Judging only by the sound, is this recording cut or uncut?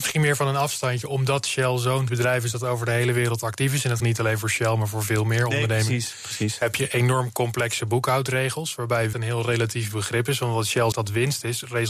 cut